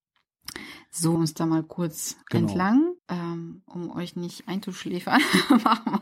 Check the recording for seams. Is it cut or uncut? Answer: cut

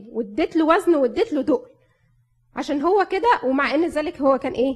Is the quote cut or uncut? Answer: uncut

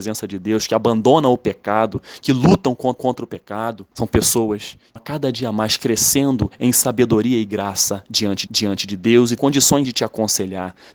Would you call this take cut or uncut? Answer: cut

